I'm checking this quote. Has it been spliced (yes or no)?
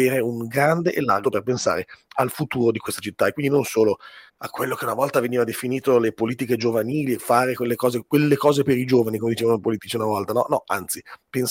yes